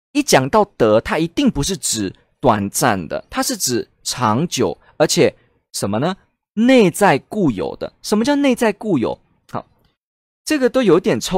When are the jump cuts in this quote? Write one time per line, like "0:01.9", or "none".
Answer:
none